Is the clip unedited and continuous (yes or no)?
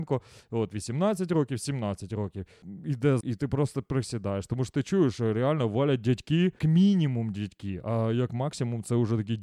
no